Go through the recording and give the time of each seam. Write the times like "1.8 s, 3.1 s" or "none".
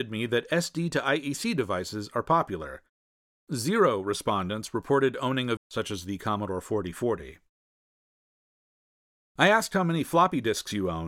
5.6 s